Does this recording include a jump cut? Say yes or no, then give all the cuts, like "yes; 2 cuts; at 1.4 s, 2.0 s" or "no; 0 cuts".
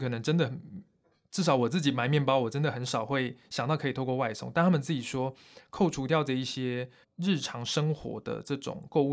yes; 1 cut; at 7.0 s